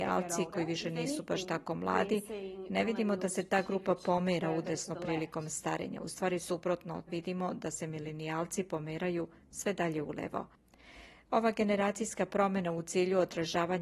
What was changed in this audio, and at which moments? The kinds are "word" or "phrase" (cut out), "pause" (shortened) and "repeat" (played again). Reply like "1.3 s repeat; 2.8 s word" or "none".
7.1 s word